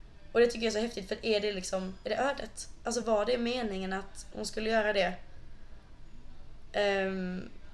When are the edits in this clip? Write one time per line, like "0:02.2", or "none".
none